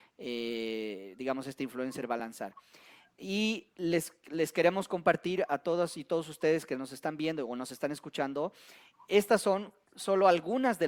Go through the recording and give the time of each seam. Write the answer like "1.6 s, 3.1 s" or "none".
none